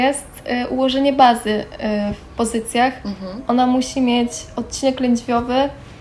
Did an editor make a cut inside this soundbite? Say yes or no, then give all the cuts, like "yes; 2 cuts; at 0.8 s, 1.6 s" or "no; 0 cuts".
no; 0 cuts